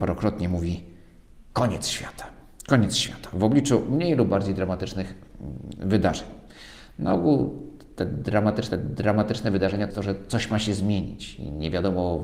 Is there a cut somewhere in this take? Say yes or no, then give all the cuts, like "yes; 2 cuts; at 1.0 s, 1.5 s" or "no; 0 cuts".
yes; 2 cuts; at 8.7 s, 9.9 s